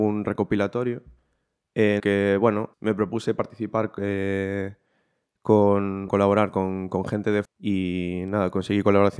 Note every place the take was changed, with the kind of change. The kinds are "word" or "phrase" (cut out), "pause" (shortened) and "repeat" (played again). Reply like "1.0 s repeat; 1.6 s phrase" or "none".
2.0 s word; 2.7 s word; 6.1 s word; 7.4 s word